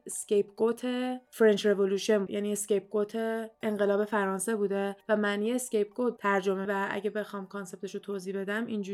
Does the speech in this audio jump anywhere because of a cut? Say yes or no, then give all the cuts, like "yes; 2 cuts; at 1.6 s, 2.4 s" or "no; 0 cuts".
yes; 3 cuts; at 2.3 s, 6.2 s, 6.6 s